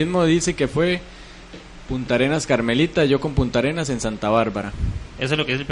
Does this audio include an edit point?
no; 0 cuts

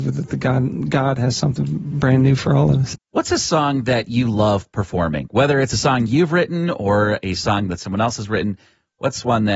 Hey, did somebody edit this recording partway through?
no; 0 cuts

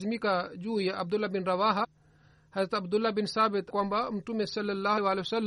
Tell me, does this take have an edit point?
yes; 1 cut; at 3.7 s

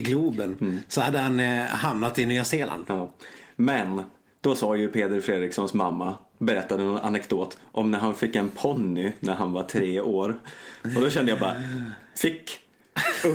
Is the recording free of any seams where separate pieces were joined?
yes; 0 cuts

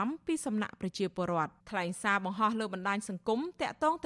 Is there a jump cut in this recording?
yes; 1 cut; at 1.6 s

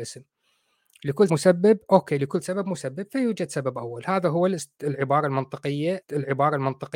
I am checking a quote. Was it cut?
yes; 2 cuts; at 1.3 s, 6.0 s

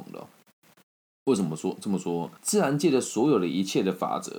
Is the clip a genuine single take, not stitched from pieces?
no; 1 cut; at 2.4 s

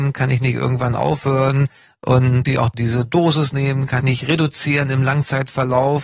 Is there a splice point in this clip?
yes; 2 cuts; at 2.5 s, 4.0 s

